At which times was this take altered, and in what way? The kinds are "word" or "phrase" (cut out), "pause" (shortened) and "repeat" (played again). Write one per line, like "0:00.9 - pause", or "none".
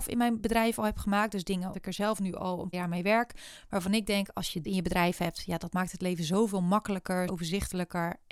0:01.7 - word
0:02.7 - word
0:04.6 - word
0:07.3 - word

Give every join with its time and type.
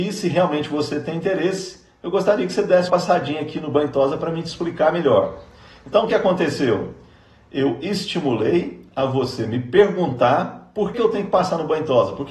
0:02.9 - word
0:06.1 - word
0:10.9 - word

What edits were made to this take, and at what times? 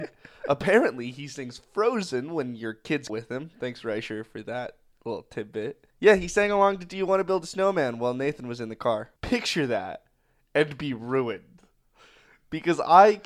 0:03.1 - word
0:05.9 - pause
0:09.2 - pause

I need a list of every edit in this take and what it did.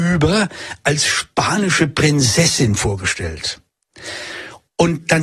none

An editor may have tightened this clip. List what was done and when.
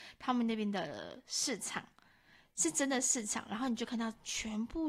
none

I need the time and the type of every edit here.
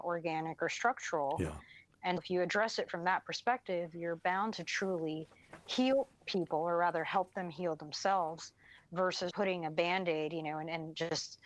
0:02.2 - word
0:09.3 - word

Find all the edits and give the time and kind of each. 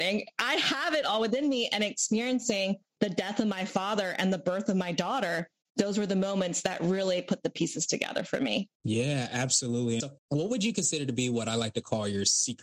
0:08.8 - pause
0:10.2 - pause

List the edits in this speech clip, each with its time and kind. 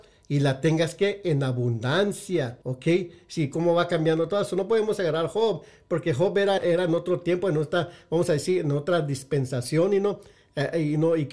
0:02.6 - pause
0:06.6 - word

